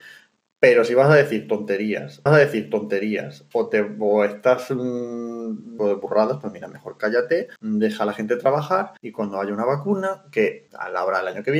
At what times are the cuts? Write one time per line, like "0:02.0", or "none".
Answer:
0:02.3
0:05.8
0:07.6
0:09.0
0:10.7